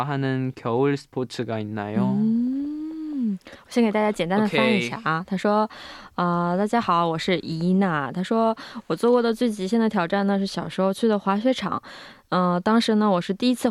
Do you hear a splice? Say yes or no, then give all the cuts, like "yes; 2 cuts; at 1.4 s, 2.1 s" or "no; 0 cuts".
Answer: no; 0 cuts